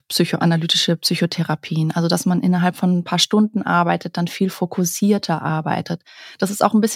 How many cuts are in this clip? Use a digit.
0